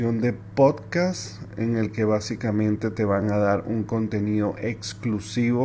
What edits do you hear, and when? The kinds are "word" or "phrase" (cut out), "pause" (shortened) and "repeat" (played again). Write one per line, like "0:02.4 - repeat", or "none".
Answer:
none